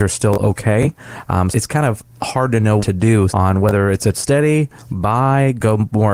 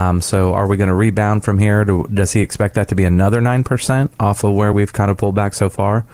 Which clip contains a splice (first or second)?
first